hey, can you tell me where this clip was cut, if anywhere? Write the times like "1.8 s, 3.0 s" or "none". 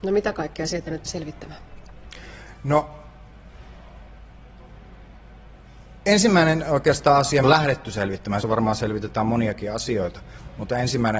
1.1 s, 7.4 s, 8.4 s